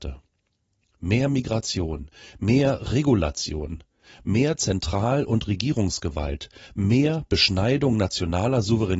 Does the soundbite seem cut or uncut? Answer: uncut